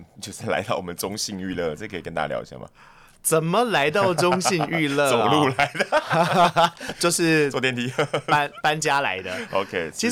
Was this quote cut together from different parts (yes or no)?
no